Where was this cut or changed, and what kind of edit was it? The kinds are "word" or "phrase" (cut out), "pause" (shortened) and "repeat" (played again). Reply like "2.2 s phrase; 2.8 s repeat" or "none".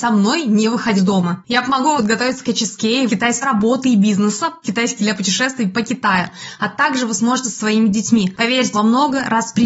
1.0 s word; 2.0 s word; 3.1 s word; 3.4 s word; 4.6 s word; 5.0 s word; 7.4 s word; 8.7 s word